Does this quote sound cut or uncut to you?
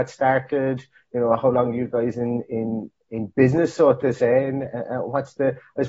uncut